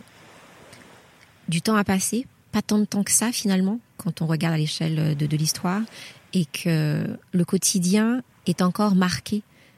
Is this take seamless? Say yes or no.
yes